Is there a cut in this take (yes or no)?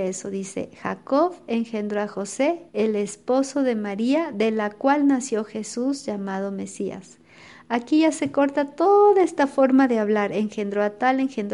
yes